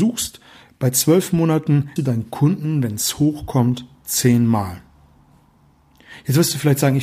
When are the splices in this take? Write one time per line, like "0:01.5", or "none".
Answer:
0:02.0